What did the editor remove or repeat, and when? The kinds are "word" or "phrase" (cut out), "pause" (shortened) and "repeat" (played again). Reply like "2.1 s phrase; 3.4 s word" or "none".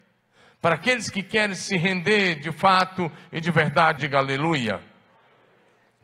4.0 s phrase

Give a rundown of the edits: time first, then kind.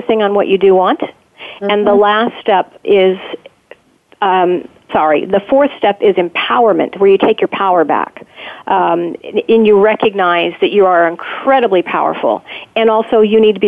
2.8 s word; 4.9 s word; 9.2 s word

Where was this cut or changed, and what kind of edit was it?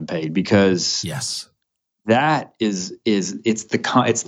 none

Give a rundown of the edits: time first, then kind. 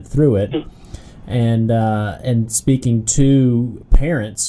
none

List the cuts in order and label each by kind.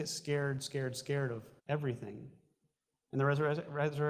1.6 s pause

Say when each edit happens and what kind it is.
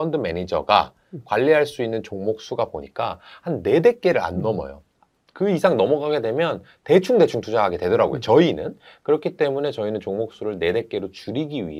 none

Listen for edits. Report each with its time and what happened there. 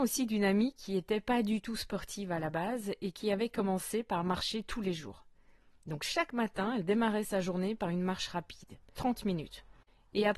9.0 s word

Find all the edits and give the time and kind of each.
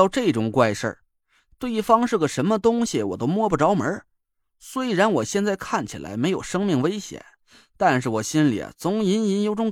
none

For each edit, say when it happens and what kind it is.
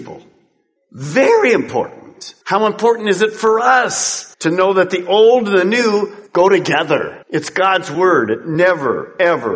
2.4 s pause; 4.3 s pause; 6.3 s pause; 7.2 s pause

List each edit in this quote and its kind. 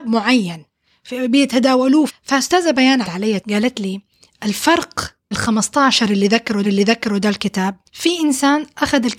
2.1 s phrase; 3.0 s word; 3.4 s word; 5.3 s word; 6.6 s repeat; 7.9 s pause

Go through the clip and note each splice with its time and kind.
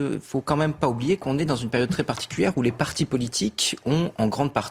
none

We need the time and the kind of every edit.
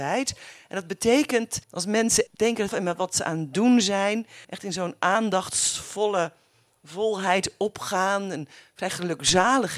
1.6 s pause; 2.3 s word; 2.7 s phrase; 4.4 s pause

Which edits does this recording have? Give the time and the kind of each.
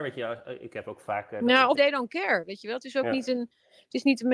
1.7 s word

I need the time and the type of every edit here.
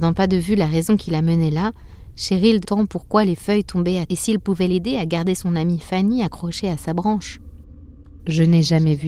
2.6 s phrase; 4.1 s word

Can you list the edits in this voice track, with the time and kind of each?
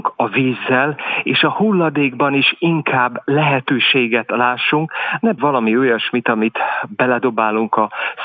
5.4 s word

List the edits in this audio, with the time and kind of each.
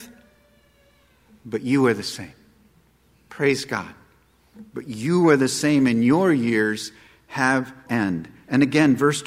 7.9 s word

